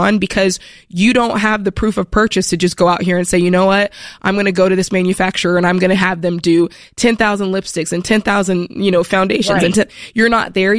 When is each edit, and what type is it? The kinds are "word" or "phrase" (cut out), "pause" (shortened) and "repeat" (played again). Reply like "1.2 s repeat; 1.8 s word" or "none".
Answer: none